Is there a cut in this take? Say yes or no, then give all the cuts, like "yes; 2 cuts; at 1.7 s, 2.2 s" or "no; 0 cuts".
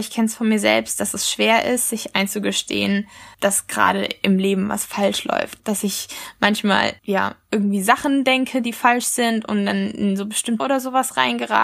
yes; 4 cuts; at 3.3 s, 5.6 s, 7.0 s, 10.6 s